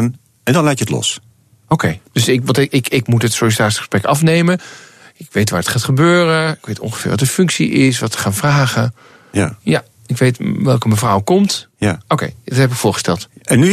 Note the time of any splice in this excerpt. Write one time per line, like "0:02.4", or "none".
none